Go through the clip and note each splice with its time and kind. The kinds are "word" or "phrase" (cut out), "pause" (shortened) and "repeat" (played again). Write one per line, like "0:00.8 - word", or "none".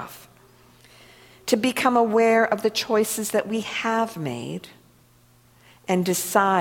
none